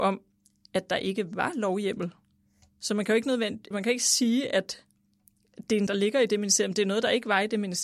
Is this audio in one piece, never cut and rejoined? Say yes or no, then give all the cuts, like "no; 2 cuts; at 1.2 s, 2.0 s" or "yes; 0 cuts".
no; 2 cuts; at 3.7 s, 5.9 s